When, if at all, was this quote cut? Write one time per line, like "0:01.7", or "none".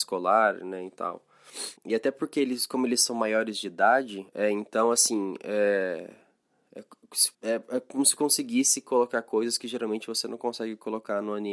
0:01.8
0:04.3
0:07.3